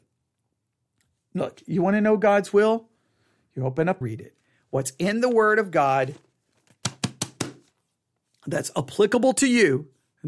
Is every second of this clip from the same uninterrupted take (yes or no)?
no